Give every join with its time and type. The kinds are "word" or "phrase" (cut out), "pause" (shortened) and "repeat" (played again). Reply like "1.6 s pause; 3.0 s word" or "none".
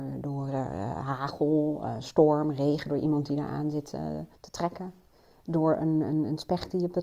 4.3 s pause